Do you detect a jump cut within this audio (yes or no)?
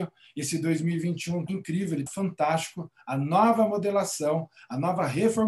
yes